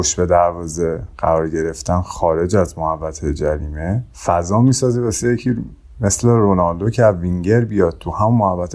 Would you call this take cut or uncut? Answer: cut